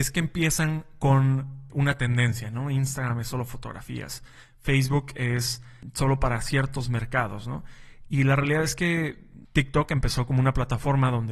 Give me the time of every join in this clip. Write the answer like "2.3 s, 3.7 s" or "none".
none